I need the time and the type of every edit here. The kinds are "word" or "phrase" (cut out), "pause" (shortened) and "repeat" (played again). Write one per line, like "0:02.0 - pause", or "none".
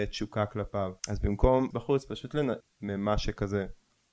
0:01.0 - pause
0:01.7 - word
0:02.6 - word